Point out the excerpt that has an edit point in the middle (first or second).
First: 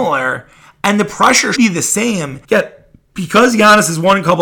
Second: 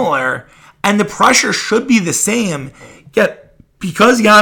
first